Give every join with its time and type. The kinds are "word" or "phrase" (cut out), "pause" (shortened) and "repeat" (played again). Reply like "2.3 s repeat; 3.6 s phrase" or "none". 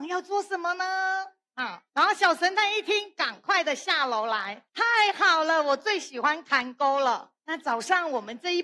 1.9 s pause; 4.7 s pause; 7.4 s pause